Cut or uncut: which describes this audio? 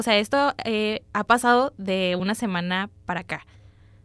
uncut